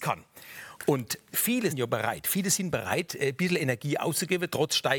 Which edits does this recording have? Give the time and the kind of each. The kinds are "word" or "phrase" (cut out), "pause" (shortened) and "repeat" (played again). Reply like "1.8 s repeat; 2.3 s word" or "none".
1.7 s word